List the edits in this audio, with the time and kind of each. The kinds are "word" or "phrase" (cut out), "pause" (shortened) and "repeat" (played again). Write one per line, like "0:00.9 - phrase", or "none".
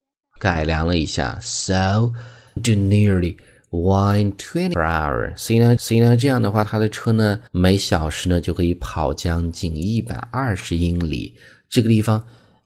0:02.6 - word
0:04.7 - phrase
0:05.8 - repeat
0:07.5 - pause